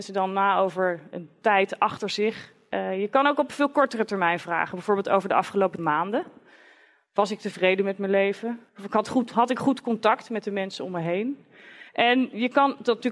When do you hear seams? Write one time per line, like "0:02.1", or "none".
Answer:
0:01.1
0:05.8
0:08.7
0:11.9